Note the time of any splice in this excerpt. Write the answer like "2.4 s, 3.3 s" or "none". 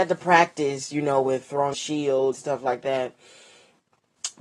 1.7 s, 2.3 s